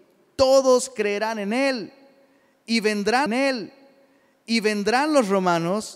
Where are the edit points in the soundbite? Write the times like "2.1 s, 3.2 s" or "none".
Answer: 3.3 s